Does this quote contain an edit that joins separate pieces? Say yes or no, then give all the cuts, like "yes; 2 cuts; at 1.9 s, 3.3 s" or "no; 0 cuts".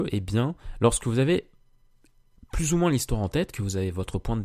no; 0 cuts